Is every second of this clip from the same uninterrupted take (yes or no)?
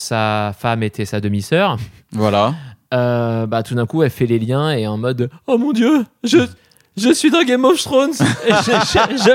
yes